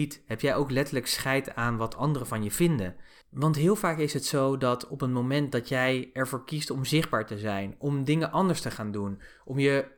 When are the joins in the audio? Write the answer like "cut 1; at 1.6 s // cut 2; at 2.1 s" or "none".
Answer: none